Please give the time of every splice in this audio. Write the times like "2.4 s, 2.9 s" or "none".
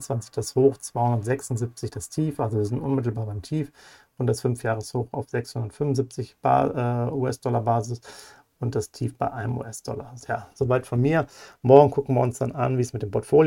none